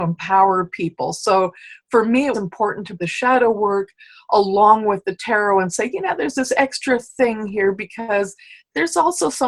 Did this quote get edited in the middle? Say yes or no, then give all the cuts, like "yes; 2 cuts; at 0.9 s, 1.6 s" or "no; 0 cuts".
yes; 2 cuts; at 2.3 s, 3.0 s